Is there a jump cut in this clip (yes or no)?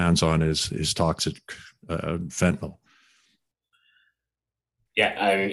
no